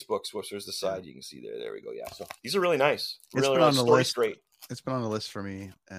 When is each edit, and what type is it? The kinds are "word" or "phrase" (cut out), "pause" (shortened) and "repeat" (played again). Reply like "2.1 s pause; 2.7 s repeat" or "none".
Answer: 2.4 s pause